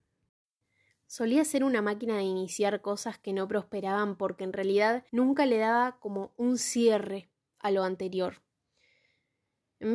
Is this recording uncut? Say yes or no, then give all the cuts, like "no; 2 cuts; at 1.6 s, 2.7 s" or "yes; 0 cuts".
no; 1 cut; at 5.1 s